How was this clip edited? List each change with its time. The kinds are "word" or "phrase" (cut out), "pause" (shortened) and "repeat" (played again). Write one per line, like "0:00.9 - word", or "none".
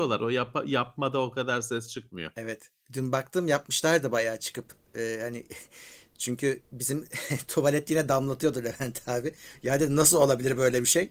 none